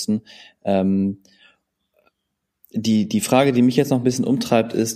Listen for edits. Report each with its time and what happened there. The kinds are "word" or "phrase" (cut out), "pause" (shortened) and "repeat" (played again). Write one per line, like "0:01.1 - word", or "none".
none